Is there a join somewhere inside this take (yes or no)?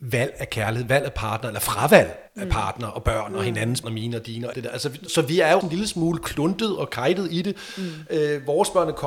yes